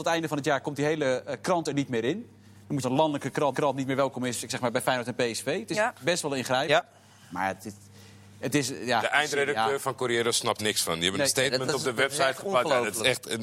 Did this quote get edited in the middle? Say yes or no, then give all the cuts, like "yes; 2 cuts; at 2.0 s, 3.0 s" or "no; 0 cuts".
yes; 3 cuts; at 2.8 s, 3.5 s, 10.6 s